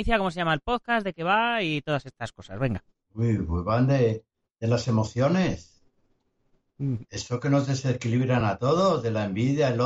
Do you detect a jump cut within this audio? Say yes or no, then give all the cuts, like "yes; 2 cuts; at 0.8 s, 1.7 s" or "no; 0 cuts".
no; 0 cuts